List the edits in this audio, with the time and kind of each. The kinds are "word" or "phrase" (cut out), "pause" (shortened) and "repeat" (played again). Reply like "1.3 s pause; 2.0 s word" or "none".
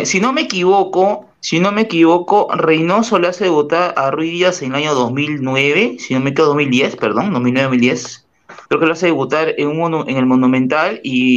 1.4 s pause; 8.7 s pause